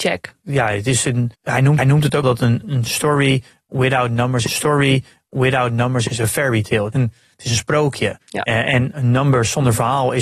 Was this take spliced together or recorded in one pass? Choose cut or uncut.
cut